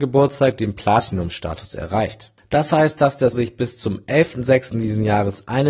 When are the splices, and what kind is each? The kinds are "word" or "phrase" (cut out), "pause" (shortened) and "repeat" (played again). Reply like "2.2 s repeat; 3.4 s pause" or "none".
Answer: 3.3 s word